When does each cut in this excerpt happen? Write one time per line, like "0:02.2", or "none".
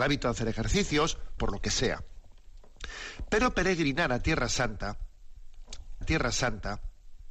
0:01.4
0:06.0